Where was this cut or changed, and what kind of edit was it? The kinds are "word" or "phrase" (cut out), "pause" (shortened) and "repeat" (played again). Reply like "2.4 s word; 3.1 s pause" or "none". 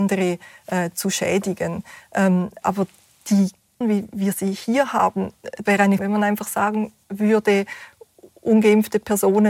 2.6 s word; 3.8 s word; 5.7 s word; 6.0 s word